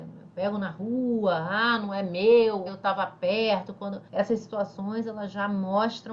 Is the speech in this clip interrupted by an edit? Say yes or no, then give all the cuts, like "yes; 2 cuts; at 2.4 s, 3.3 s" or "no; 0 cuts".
yes; 2 cuts; at 2.7 s, 4.1 s